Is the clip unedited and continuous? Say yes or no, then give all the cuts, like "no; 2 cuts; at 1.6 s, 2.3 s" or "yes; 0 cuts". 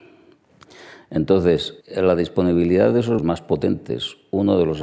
no; 2 cuts; at 1.8 s, 3.2 s